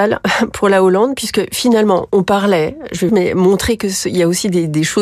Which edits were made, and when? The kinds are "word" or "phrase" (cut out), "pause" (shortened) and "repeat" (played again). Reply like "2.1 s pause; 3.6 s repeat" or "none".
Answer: 3.1 s phrase